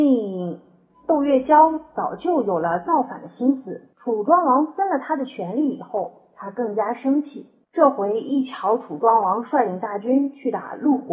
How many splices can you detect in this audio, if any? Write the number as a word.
two